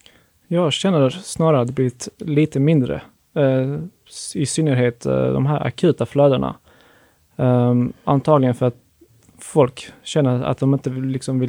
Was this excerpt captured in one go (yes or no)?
yes